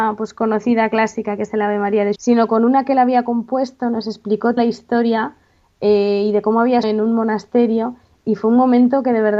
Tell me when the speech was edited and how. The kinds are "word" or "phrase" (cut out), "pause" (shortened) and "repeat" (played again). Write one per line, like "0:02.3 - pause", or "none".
0:02.2 - word
0:04.6 - word
0:06.8 - word